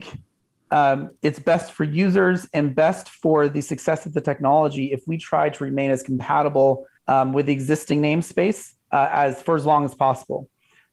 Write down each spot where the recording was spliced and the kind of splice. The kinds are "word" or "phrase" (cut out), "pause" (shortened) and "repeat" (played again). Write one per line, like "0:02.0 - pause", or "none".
0:01.2 - pause
0:07.0 - pause
0:08.8 - pause